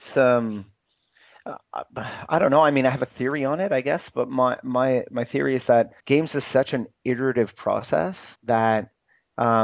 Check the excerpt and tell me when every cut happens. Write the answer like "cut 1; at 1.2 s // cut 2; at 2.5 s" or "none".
cut 1; at 6.0 s // cut 2; at 8.4 s